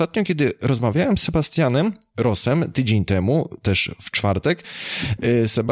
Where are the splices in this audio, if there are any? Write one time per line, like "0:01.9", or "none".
none